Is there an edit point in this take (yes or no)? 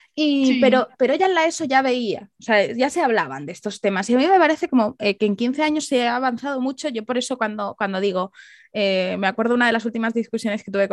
no